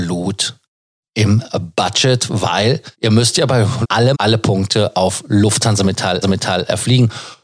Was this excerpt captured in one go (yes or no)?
no